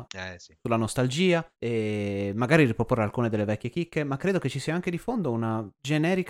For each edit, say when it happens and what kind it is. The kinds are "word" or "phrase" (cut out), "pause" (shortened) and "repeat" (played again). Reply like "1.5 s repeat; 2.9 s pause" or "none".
1.5 s pause